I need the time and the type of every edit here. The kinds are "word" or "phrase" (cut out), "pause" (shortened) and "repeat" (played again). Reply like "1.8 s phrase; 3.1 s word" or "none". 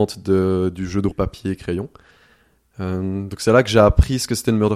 1.1 s phrase